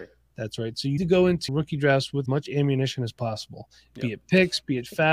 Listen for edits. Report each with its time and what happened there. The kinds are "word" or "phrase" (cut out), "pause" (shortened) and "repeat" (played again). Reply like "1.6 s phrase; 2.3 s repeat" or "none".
1.0 s word; 1.5 s word; 2.3 s word